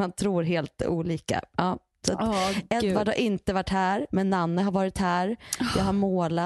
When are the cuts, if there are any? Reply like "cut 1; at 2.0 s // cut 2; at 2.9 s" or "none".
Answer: none